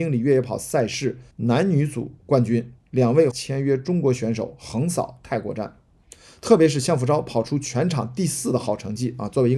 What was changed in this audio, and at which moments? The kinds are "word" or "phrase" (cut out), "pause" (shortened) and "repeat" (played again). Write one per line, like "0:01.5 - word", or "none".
0:01.3 - pause
0:02.8 - pause
0:03.3 - phrase